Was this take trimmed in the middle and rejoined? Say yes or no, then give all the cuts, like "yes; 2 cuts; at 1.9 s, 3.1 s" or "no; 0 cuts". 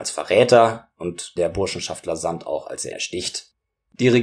yes; 2 cuts; at 1.4 s, 2.9 s